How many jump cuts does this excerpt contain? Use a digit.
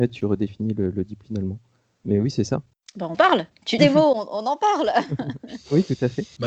3